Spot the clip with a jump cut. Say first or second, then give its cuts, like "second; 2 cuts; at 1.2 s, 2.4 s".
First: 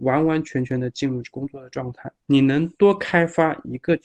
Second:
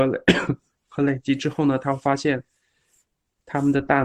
first; 1 cut; at 2.2 s